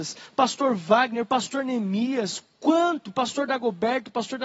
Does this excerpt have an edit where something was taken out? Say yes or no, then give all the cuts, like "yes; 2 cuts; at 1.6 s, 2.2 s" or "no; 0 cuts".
no; 0 cuts